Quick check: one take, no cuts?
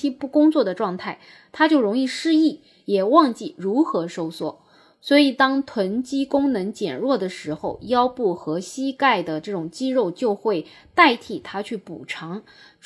yes; 0 cuts

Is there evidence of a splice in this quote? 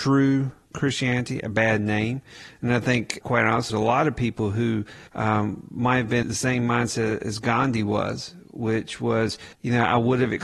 yes; 5 cuts; at 3.2 s, 3.7 s, 5.1 s, 6.2 s, 9.5 s

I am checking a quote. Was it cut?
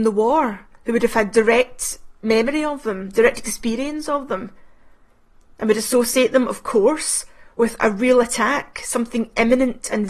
no; 0 cuts

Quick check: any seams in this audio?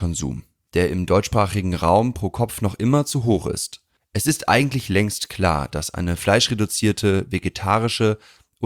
yes; 1 cut; at 4.0 s

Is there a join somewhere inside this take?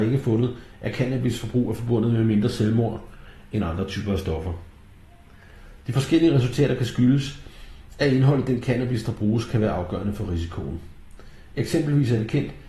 no; 0 cuts

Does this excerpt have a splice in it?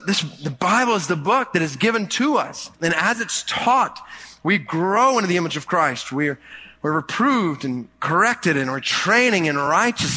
yes; 1 cut; at 2.7 s

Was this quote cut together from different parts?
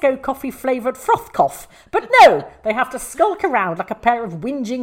no; 0 cuts

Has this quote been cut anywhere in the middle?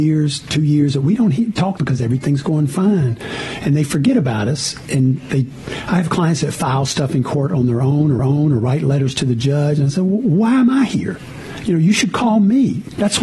yes; 2 cuts; at 1.8 s, 8.2 s

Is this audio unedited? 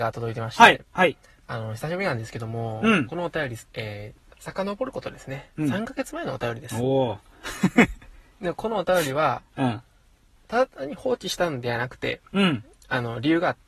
yes; 0 cuts

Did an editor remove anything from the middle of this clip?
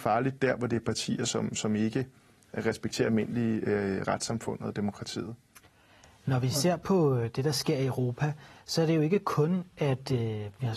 yes; 1 cut; at 4.0 s

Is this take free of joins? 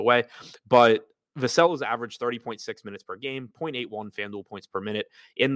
yes; 0 cuts

